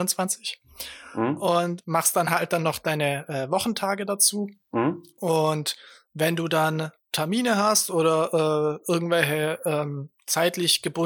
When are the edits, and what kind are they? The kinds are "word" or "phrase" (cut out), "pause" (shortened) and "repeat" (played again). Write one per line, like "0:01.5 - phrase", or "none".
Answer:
none